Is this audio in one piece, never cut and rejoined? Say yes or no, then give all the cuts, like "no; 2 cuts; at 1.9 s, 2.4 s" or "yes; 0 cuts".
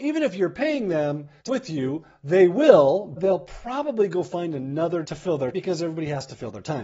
no; 4 cuts; at 1.5 s, 3.2 s, 5.0 s, 5.5 s